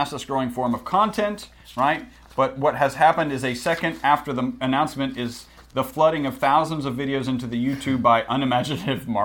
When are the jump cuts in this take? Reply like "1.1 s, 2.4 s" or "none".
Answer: none